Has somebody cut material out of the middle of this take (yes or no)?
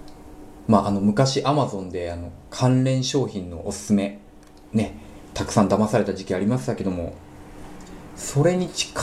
no